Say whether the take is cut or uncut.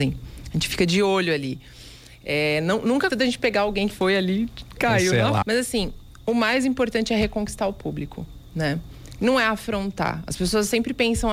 cut